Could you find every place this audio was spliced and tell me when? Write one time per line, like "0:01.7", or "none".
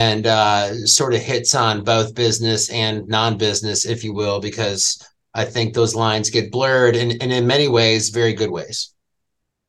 none